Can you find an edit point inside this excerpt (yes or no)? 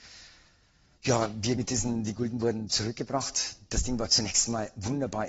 yes